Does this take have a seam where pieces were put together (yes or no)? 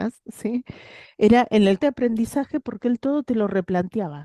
yes